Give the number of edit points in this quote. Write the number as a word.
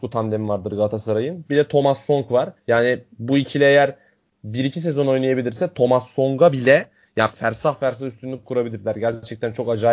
one